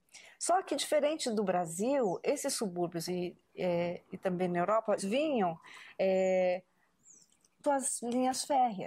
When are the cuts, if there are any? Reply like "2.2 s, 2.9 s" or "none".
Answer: 3.1 s, 5.0 s, 7.6 s